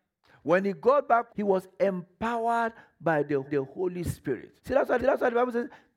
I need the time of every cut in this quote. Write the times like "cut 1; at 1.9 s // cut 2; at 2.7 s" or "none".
cut 1; at 1.3 s // cut 2; at 3.4 s // cut 3; at 4.6 s // cut 4; at 5.0 s